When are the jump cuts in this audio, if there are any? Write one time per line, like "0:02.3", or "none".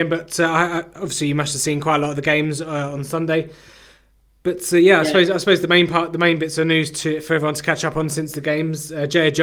none